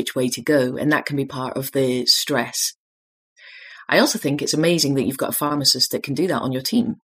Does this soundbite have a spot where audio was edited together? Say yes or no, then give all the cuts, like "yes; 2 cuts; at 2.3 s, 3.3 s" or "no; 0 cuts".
no; 0 cuts